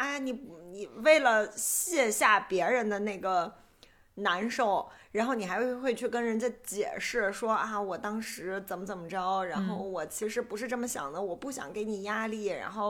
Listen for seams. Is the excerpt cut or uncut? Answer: uncut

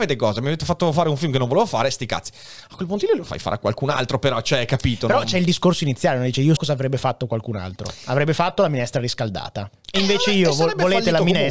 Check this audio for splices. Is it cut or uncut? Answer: cut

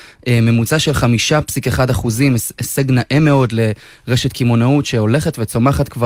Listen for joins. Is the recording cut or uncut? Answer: uncut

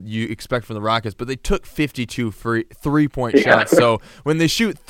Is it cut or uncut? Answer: uncut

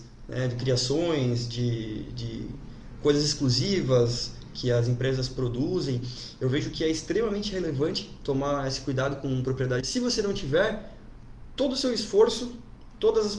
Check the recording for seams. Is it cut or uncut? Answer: cut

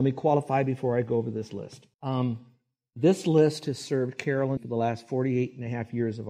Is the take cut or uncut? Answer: cut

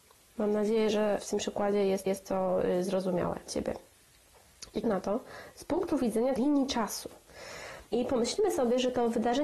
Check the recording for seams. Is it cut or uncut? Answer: cut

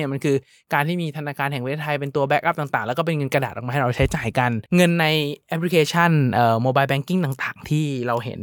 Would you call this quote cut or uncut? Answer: cut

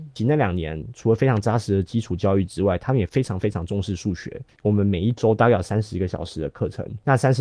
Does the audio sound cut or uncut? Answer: uncut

